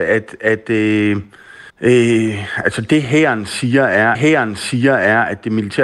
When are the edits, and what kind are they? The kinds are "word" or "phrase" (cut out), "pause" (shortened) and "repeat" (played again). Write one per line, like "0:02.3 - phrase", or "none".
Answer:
0:01.7 - pause
0:04.1 - repeat